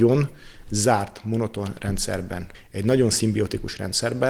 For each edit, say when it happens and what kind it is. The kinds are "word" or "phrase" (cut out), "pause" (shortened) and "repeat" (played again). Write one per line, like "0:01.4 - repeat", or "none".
0:02.5 - pause